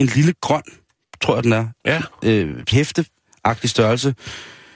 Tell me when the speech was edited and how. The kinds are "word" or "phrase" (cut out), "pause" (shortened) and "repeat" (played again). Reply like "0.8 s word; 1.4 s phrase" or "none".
2.7 s word